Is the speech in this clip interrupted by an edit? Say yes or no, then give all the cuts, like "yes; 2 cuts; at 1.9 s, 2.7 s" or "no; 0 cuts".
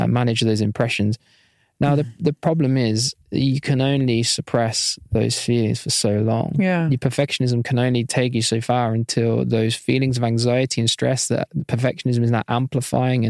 no; 0 cuts